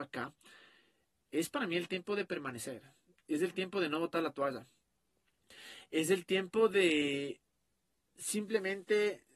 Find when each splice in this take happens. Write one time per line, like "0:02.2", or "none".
none